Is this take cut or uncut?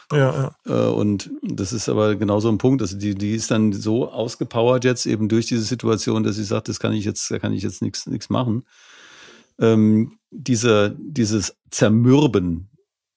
uncut